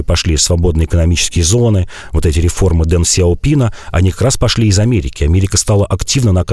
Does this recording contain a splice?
no; 0 cuts

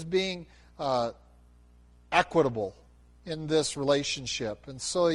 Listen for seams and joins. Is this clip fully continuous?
yes; 0 cuts

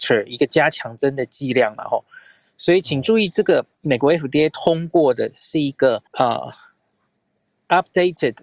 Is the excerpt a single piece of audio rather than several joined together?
no; 1 cut; at 6.1 s

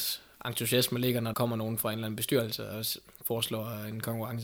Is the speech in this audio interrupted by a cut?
yes; 1 cut; at 1.3 s

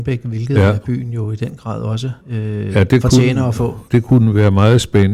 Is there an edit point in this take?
yes; 2 cuts; at 2.2 s, 3.9 s

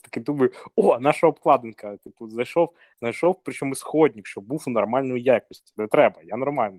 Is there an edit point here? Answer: no; 0 cuts

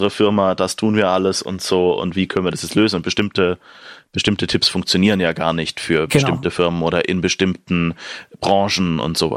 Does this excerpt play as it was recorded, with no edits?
yes; 0 cuts

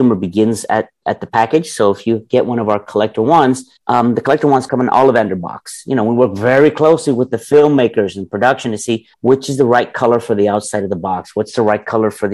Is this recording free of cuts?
no; 3 cuts; at 3.8 s, 4.7 s, 9.1 s

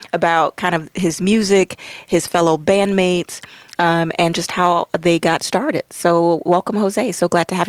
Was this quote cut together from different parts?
no; 0 cuts

